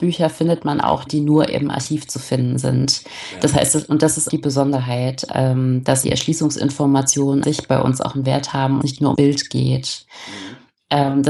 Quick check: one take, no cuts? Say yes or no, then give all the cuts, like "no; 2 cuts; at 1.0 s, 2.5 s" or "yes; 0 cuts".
no; 6 cuts; at 1.1 s, 4.3 s, 6.0 s, 7.4 s, 8.8 s, 9.1 s